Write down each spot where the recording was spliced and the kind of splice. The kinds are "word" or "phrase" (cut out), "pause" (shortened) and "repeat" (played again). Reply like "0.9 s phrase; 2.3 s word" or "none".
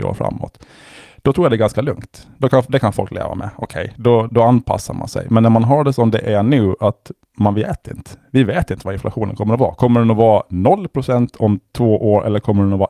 4.3 s word